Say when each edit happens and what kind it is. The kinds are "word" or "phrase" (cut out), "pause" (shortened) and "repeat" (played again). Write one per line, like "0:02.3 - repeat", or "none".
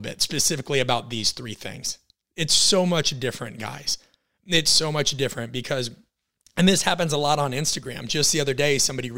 none